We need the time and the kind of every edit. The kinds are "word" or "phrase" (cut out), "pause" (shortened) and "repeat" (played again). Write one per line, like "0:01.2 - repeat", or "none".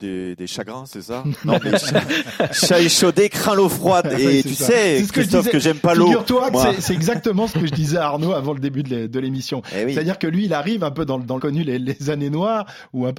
0:11.4 - phrase